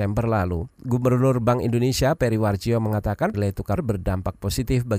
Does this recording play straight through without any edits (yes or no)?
no